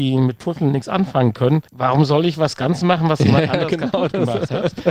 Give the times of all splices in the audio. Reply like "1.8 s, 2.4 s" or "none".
1.7 s